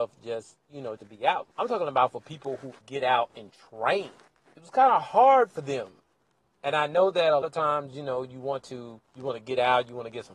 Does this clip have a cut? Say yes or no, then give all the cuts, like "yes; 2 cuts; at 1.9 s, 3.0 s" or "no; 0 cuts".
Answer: yes; 6 cuts; at 1.0 s, 1.5 s, 2.8 s, 4.5 s, 7.4 s, 9.0 s